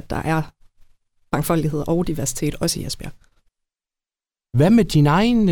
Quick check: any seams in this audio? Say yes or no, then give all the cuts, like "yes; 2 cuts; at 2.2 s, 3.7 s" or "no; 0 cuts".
no; 0 cuts